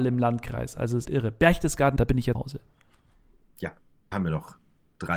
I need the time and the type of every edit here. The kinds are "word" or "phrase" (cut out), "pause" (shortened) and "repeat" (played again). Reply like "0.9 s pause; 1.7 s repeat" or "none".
1.0 s word; 2.0 s word; 2.3 s word; 4.1 s word